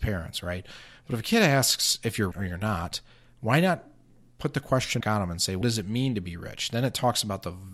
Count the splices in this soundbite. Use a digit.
3